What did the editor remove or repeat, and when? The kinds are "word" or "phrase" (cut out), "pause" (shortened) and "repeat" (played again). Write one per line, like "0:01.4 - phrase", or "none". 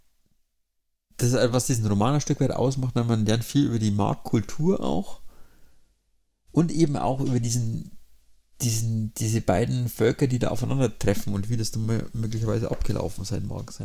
none

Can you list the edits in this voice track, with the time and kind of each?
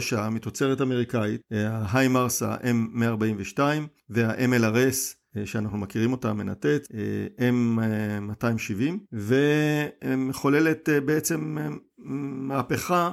none

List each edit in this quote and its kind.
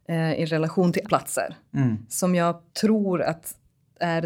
0:01.0 - word
0:02.7 - pause

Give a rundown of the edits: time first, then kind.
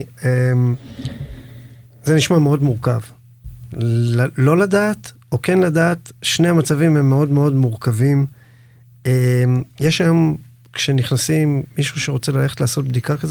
none

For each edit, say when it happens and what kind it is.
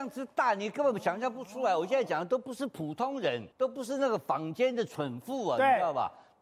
0:03.5 - pause

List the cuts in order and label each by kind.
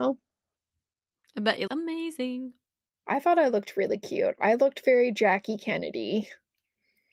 0:01.7 - word

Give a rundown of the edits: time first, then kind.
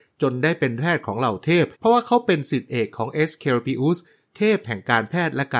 0:01.7 - pause

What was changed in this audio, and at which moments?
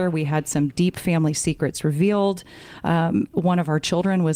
none

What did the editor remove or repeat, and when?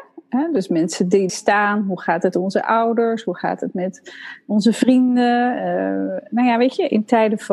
0:01.3 - word
0:02.3 - word

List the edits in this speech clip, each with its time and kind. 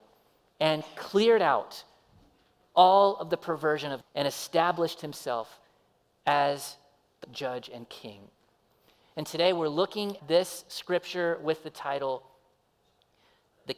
0:04.0 - word
0:07.2 - word
0:10.2 - word

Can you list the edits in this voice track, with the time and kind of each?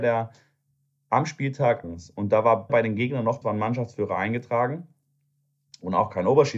0:01.8 - word
0:02.7 - word
0:03.4 - word

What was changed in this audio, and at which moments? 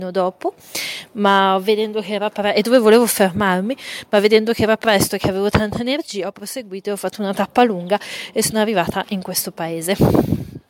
none

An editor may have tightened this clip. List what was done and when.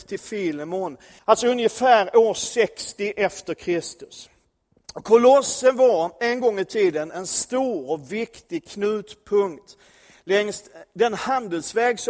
0:01.2 - pause

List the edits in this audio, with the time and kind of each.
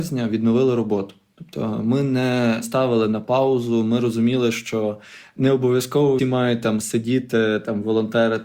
0:06.2 - word

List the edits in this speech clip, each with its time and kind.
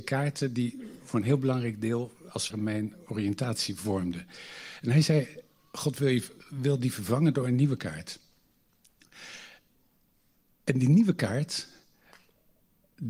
0:02.5 - word

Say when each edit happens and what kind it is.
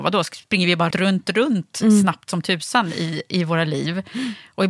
0:00.9 - word

